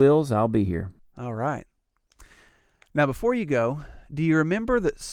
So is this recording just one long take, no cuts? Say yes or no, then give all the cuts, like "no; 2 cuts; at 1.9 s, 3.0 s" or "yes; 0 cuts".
yes; 0 cuts